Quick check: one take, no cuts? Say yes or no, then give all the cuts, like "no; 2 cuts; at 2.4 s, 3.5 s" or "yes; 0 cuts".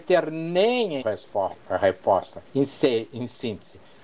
no; 2 cuts; at 1.0 s, 2.5 s